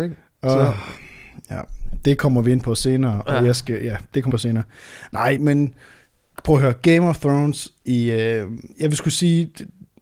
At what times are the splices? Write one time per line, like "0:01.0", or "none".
0:04.3
0:05.4
0:08.7